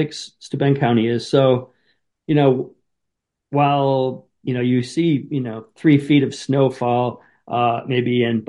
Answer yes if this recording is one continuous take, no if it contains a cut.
yes